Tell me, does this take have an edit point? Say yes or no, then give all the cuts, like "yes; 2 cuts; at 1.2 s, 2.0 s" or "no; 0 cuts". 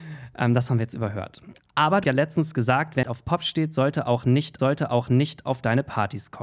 yes; 3 cuts; at 2.0 s, 3.0 s, 4.6 s